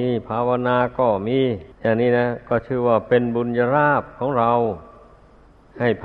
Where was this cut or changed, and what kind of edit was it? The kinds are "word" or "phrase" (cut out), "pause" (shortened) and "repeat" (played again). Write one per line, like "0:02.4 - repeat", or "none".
0:01.7 - pause

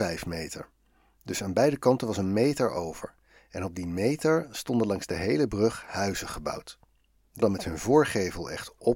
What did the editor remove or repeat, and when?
0:07.4 - word

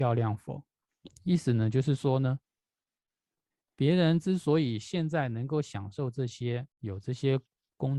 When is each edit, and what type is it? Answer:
0:06.7 - pause

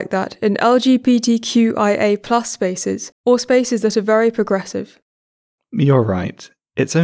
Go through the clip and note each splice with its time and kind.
0:03.2 - pause

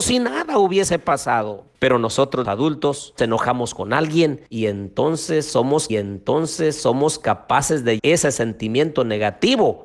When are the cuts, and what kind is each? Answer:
0:01.7 - pause
0:02.4 - word
0:03.2 - word
0:04.5 - pause
0:05.9 - repeat
0:08.0 - word

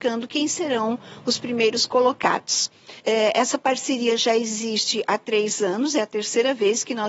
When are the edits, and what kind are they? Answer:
0:03.0 - pause

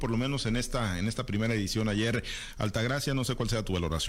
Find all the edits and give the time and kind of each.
none

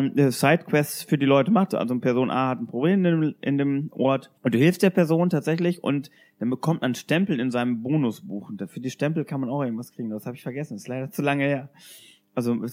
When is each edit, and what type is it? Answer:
0:04.4 - pause

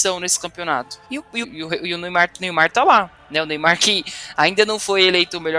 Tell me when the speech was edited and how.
0:01.0 - pause
0:01.4 - phrase

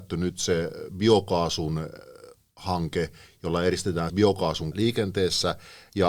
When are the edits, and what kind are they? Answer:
0:04.1 - word
0:04.7 - word

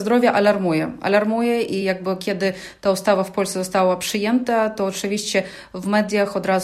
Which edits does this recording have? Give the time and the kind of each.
none

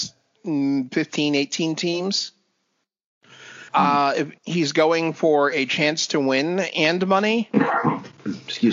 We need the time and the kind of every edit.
0:03.7 - pause
0:04.4 - pause

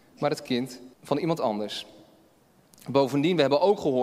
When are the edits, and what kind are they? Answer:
0:00.9 - pause

